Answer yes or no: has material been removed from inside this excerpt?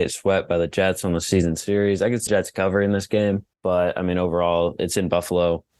yes